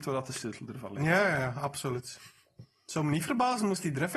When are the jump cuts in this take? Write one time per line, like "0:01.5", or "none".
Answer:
none